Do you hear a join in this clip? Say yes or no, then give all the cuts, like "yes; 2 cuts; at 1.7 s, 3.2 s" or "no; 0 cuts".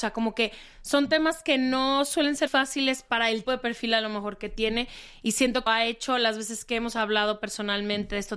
yes; 3 cuts; at 2.5 s, 3.4 s, 5.7 s